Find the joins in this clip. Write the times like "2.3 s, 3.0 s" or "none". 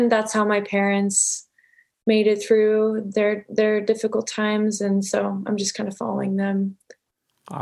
none

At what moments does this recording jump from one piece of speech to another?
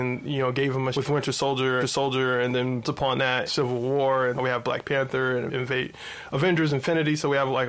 0.9 s, 1.8 s, 2.8 s, 3.5 s, 4.4 s, 5.5 s

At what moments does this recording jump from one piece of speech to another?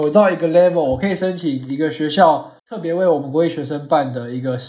2.6 s

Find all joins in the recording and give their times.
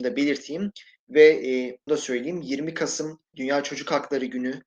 1.9 s, 3.3 s

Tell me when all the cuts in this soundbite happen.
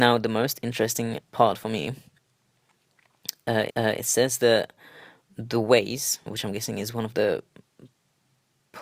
1.3 s, 3.7 s, 6.3 s

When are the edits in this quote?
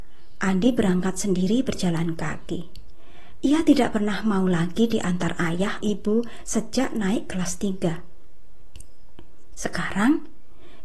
5.8 s

